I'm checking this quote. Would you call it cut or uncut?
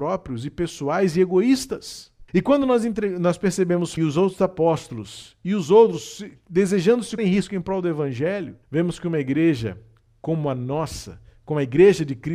cut